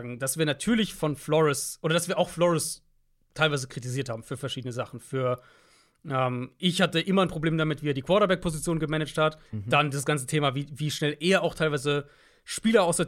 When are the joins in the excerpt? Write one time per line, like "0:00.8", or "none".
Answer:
0:09.5